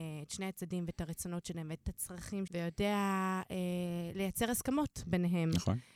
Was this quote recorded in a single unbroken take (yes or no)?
no